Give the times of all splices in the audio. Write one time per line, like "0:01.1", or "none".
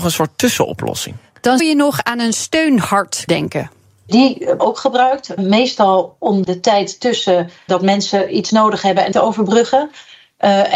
0:01.6
0:03.3
0:04.6
0:05.4
0:06.4
0:07.7
0:08.5
0:09.1